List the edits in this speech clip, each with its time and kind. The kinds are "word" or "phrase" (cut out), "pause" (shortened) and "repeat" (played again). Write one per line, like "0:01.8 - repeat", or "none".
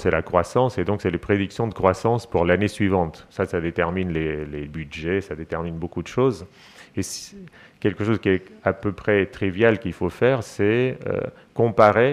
none